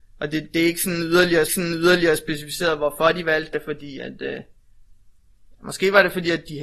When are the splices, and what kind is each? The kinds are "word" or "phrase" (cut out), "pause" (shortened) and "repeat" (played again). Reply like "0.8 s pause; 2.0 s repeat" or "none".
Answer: 1.5 s repeat; 3.5 s phrase